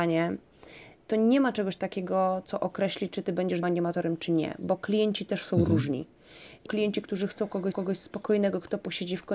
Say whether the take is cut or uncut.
cut